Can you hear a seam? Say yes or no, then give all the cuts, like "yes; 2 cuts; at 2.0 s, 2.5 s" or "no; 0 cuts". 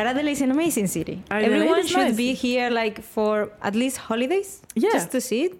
no; 0 cuts